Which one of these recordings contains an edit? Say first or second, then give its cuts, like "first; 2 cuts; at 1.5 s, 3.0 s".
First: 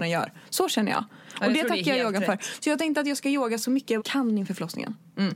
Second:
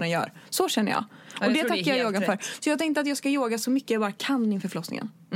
first; 1 cut; at 4.0 s